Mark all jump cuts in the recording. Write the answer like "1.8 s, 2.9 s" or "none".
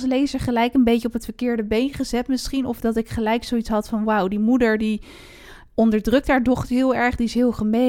none

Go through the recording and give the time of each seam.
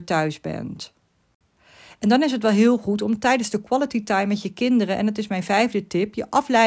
none

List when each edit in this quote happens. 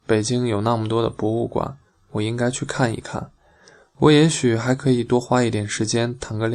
none

